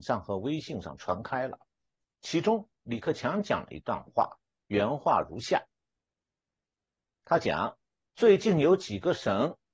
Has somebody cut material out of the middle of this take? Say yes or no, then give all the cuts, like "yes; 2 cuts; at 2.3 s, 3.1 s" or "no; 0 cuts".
no; 0 cuts